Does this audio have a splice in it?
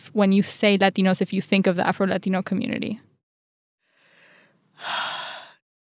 no; 0 cuts

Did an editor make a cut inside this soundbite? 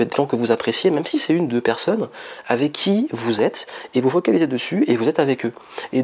no; 0 cuts

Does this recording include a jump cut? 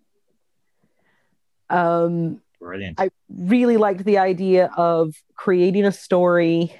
yes; 1 cut; at 2.5 s

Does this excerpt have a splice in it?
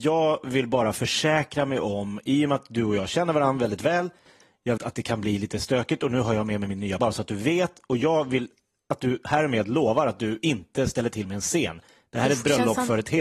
yes; 2 cuts; at 4.8 s, 7.0 s

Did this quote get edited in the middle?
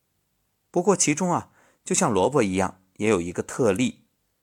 no; 0 cuts

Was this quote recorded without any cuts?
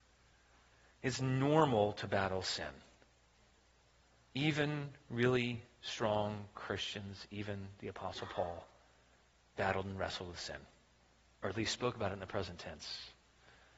yes; 0 cuts

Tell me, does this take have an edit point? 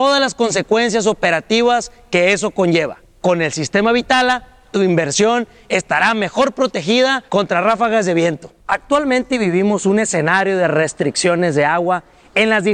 yes; 3 cuts; at 3.0 s, 7.3 s, 8.6 s

